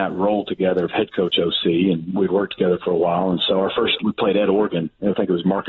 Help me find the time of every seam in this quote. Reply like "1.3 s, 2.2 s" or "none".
4.0 s